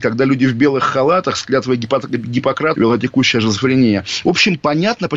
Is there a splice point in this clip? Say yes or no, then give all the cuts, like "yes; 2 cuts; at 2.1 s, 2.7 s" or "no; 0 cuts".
yes; 1 cut; at 2.7 s